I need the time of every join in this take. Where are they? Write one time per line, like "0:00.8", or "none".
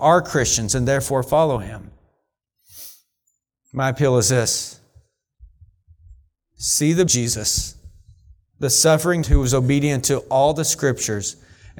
0:07.1
0:09.2